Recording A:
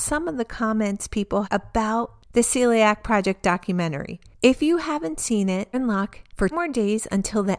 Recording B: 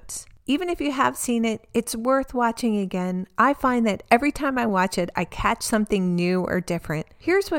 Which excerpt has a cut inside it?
A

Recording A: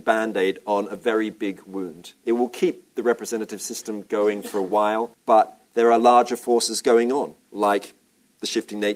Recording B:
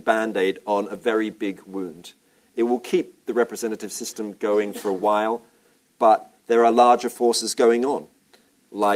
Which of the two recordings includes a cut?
A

